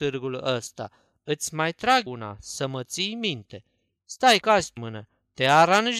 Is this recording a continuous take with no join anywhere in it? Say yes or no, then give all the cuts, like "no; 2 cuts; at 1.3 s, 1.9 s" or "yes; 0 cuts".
no; 3 cuts; at 2.1 s, 4.4 s, 4.8 s